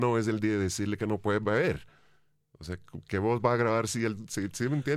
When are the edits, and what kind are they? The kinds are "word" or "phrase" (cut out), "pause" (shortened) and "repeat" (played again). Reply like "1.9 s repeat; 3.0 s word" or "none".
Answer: none